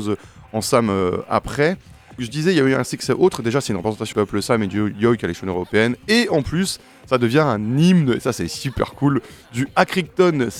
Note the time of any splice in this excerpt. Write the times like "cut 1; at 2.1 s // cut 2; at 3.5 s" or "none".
cut 1; at 2.2 s // cut 2; at 4.1 s